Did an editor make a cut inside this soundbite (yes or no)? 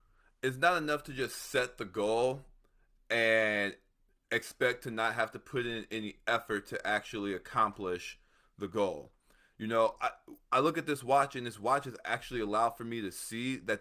no